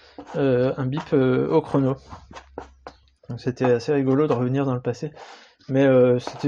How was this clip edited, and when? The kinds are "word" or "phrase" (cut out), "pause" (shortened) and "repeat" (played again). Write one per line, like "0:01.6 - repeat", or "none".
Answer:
none